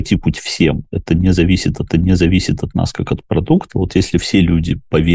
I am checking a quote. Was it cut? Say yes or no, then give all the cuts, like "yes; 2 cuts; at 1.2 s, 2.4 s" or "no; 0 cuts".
yes; 1 cut; at 1.9 s